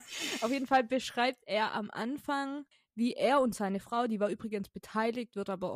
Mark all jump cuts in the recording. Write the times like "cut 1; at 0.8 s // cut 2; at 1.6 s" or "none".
cut 1; at 2.7 s